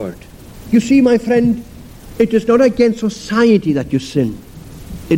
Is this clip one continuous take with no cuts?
yes; 0 cuts

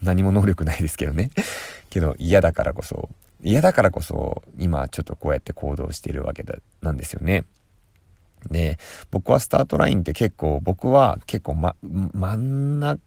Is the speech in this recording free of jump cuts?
no; 1 cut; at 11.8 s

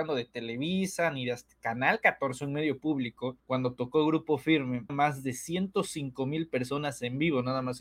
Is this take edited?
yes; 2 cuts; at 3.4 s, 4.9 s

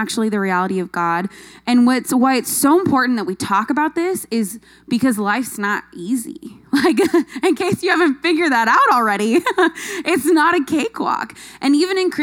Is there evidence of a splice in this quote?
no; 0 cuts

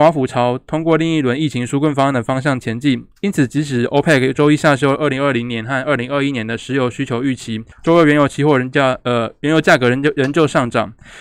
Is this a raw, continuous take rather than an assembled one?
no; 1 cut; at 7.7 s

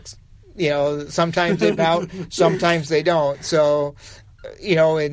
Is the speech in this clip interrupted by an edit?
yes; 1 cut; at 1.8 s

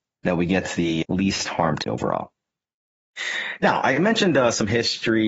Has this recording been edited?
yes; 2 cuts; at 1.0 s, 1.8 s

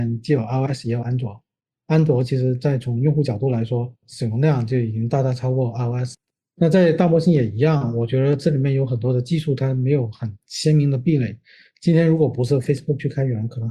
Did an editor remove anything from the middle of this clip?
no; 0 cuts

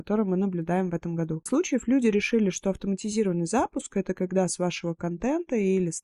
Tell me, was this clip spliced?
yes; 1 cut; at 1.5 s

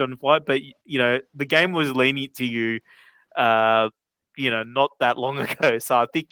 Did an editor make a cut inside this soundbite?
no; 0 cuts

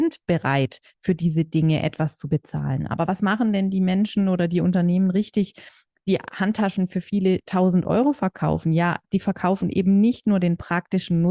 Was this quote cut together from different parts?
no; 0 cuts

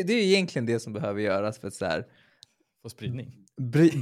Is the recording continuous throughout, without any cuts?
yes; 0 cuts

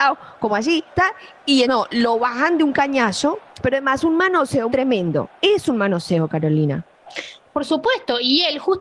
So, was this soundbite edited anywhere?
yes; 3 cuts; at 1.6 s, 3.5 s, 4.7 s

